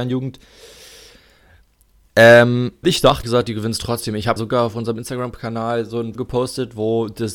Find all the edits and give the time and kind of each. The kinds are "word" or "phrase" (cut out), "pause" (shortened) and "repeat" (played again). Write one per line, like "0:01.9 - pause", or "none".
0:02.8 - word
0:03.2 - word
0:04.4 - word
0:06.2 - word